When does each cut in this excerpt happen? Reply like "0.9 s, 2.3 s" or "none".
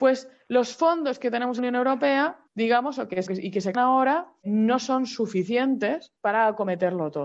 1.6 s, 2.5 s, 3.3 s, 3.7 s, 4.4 s, 6.2 s